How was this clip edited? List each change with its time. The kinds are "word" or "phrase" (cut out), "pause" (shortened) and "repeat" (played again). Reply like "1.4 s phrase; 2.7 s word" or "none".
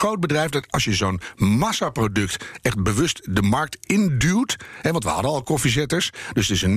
none